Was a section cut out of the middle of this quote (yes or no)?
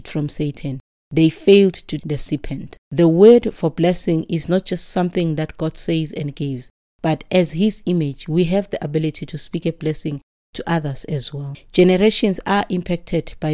yes